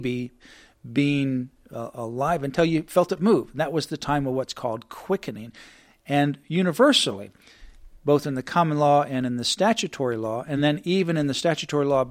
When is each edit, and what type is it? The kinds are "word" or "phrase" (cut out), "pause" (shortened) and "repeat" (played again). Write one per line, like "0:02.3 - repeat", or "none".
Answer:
none